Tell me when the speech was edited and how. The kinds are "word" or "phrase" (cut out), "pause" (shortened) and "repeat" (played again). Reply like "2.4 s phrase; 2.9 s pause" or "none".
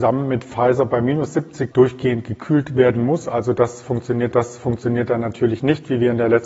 1.7 s word; 4.3 s repeat

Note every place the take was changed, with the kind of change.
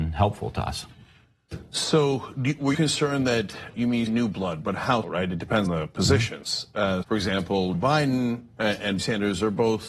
2.7 s word; 3.7 s word; 4.1 s word; 5.0 s word; 5.7 s word; 7.0 s word; 7.7 s word; 9.0 s word

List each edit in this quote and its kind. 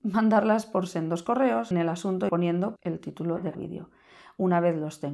1.7 s phrase; 2.3 s word; 2.8 s word; 3.5 s word

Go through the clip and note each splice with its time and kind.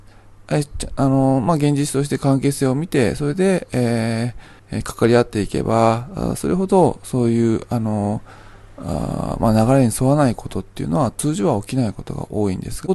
4.6 s pause

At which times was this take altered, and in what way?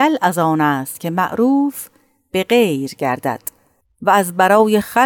none

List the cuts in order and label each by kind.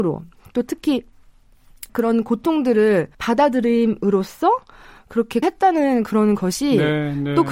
1.9 s word; 3.1 s pause; 5.4 s word

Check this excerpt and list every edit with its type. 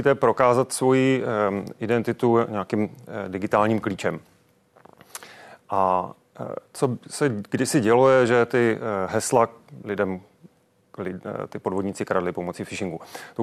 none

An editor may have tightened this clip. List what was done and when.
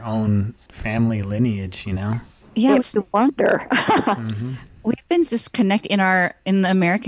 2.4 s pause; 2.8 s phrase; 5.3 s word

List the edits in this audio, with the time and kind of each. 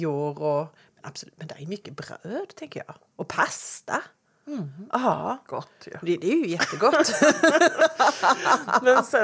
none

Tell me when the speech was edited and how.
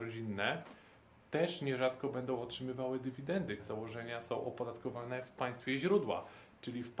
3.6 s word

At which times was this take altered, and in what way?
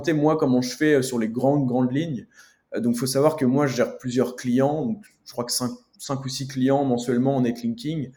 none

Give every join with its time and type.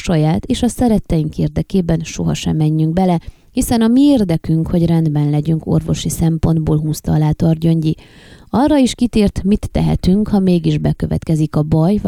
none

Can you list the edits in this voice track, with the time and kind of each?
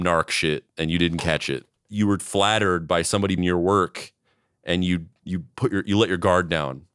2.2 s word; 3.4 s phrase; 5.2 s word

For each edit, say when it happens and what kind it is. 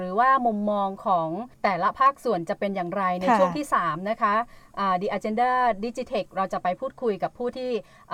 1.5 s pause

